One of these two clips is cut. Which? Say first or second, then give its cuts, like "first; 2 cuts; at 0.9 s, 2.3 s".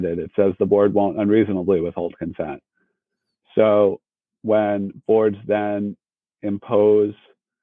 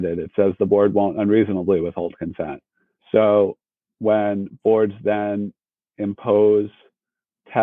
second; 1 cut; at 2.9 s